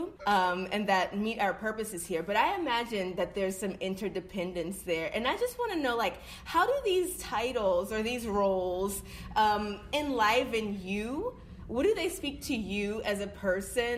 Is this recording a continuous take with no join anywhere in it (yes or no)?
yes